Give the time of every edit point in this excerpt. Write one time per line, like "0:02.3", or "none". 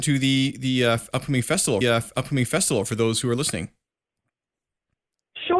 0:01.8